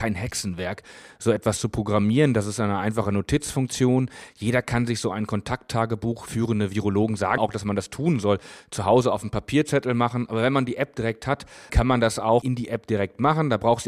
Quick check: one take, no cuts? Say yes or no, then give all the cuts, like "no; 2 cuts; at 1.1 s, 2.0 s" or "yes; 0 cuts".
no; 3 cuts; at 7.4 s, 11.7 s, 12.4 s